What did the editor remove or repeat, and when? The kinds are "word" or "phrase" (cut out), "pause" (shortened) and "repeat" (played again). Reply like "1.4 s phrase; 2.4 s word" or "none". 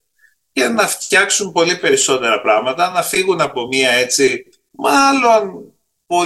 none